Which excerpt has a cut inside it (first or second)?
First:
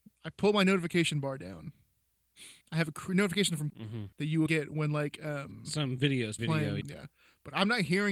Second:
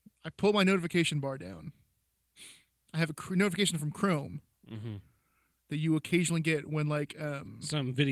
first